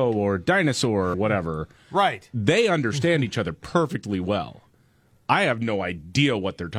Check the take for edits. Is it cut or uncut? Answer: cut